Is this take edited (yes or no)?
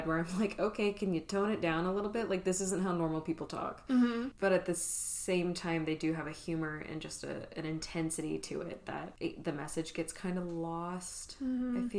no